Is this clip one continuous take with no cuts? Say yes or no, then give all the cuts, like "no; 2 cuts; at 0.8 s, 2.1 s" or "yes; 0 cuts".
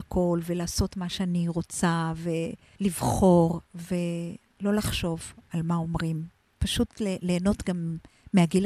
yes; 0 cuts